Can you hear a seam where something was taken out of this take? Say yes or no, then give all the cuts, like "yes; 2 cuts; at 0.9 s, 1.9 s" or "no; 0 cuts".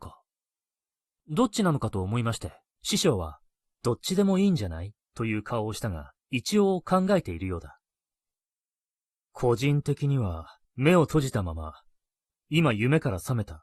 yes; 4 cuts; at 2.7 s, 6.2 s, 10.6 s, 12.3 s